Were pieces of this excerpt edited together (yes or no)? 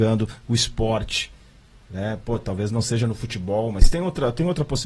no